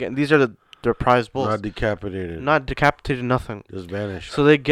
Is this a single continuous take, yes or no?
yes